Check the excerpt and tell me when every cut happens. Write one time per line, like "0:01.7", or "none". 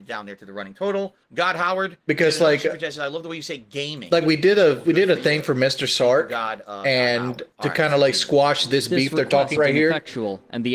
0:01.2
0:07.5
0:09.6